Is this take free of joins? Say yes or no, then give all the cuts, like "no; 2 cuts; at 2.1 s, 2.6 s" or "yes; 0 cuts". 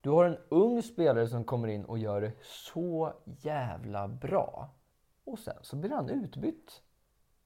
no; 1 cut; at 4.9 s